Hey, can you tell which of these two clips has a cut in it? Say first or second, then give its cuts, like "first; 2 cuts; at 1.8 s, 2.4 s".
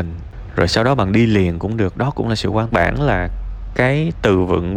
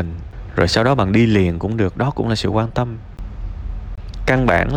first; 1 cut; at 2.7 s